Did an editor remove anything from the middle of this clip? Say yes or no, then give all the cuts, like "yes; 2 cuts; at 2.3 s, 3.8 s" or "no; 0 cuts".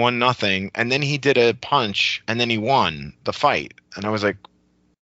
no; 0 cuts